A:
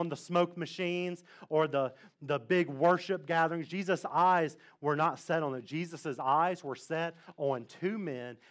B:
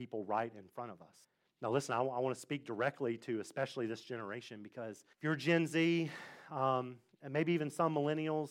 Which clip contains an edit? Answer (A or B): B